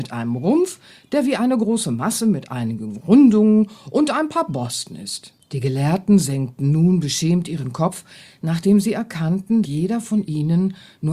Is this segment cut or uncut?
cut